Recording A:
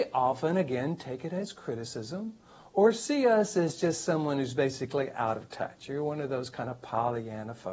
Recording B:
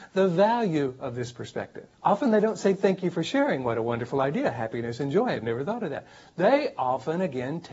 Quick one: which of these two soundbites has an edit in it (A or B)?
B